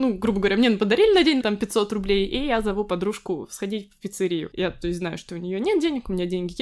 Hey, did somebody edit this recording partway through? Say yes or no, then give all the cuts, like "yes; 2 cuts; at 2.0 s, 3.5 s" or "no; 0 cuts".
yes; 1 cut; at 1.4 s